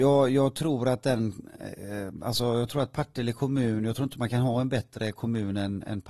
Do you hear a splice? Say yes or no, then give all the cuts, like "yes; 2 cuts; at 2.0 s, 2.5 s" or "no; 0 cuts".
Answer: no; 0 cuts